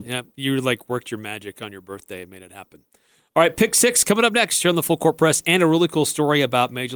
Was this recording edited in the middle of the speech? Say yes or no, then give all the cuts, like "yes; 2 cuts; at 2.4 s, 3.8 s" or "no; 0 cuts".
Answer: no; 0 cuts